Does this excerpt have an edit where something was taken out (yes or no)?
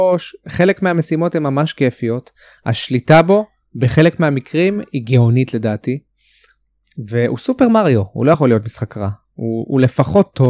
no